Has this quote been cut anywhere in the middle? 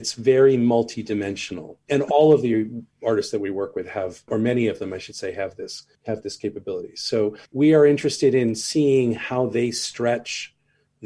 yes; 2 cuts; at 5.9 s, 7.5 s

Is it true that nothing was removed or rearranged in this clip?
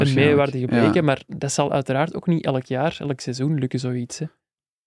yes; 0 cuts

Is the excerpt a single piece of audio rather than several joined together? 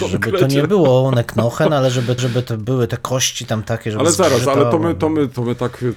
no; 1 cut; at 2.2 s

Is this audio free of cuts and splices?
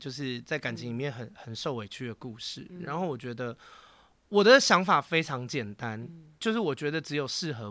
yes; 0 cuts

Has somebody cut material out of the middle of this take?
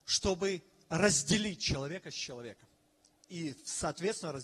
no; 0 cuts

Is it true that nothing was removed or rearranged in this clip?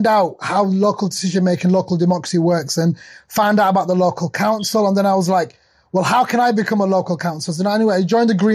yes; 0 cuts

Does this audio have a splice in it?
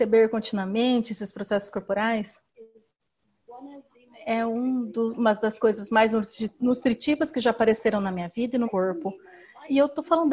yes; 1 cut; at 8.6 s

